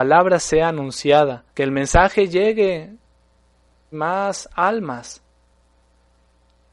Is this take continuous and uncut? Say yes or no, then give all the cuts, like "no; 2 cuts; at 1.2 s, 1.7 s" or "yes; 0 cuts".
no; 2 cuts; at 1.5 s, 3.9 s